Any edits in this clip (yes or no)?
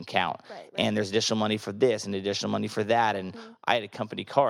no